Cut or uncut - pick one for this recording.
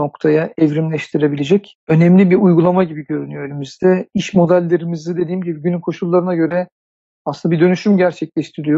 cut